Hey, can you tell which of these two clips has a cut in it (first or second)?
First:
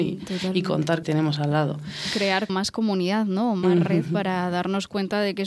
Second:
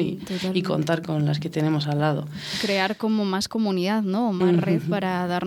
first